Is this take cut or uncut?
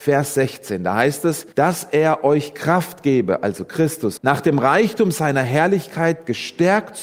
cut